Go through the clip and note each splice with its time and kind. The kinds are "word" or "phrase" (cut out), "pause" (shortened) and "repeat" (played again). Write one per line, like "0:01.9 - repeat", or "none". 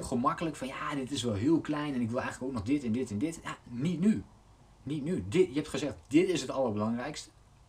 none